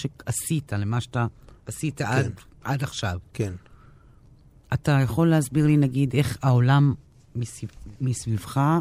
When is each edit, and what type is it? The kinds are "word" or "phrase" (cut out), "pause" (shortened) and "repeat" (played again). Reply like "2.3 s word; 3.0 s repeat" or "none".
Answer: none